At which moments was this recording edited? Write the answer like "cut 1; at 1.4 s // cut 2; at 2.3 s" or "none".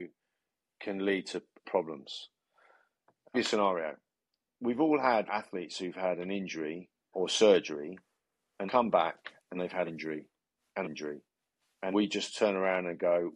cut 1; at 1.6 s // cut 2; at 3.3 s // cut 3; at 5.3 s // cut 4; at 7.1 s // cut 5; at 8.7 s // cut 6; at 9.6 s // cut 7; at 9.9 s // cut 8; at 10.8 s // cut 9; at 11.9 s